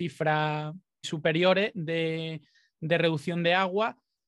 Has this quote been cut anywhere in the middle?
yes; 1 cut; at 1.0 s

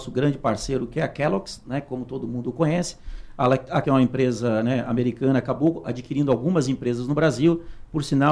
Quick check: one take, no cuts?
no; 1 cut; at 3.8 s

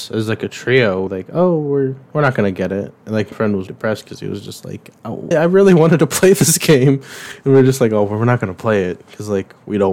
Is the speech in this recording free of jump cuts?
no; 4 cuts; at 1.1 s, 3.3 s, 3.7 s, 5.3 s

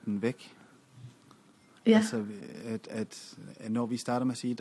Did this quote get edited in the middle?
no; 0 cuts

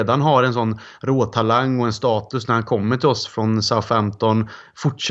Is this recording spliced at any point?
no; 0 cuts

